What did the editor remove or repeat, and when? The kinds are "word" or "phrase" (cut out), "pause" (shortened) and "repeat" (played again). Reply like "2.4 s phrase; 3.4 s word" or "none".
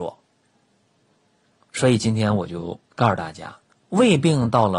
2.8 s pause; 3.7 s pause

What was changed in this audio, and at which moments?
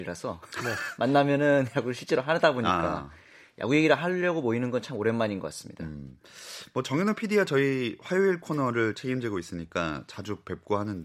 none

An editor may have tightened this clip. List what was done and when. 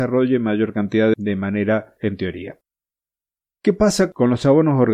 1.1 s word; 2.0 s word

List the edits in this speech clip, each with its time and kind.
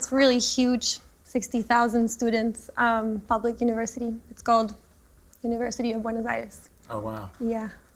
none

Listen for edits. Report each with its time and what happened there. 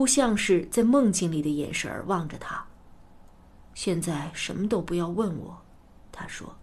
none

